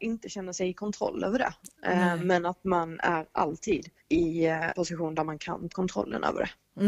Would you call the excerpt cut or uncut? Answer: cut